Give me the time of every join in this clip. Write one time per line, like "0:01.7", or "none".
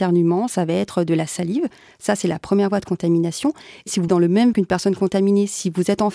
0:04.1
0:04.5